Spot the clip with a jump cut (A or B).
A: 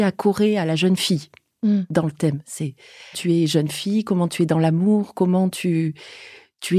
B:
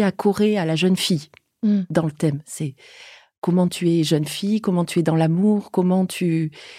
A